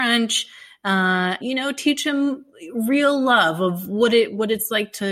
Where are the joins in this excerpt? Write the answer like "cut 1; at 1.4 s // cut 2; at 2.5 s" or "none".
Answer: cut 1; at 1.4 s